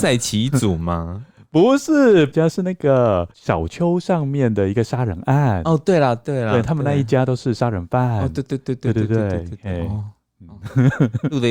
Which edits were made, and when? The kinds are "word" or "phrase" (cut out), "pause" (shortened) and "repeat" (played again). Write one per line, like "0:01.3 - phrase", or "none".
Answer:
0:02.3 - word
0:03.3 - pause